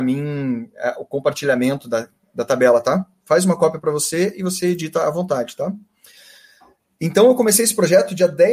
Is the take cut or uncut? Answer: uncut